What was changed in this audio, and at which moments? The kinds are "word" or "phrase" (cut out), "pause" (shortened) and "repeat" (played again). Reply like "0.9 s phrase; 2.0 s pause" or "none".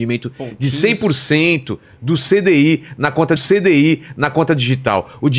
3.4 s repeat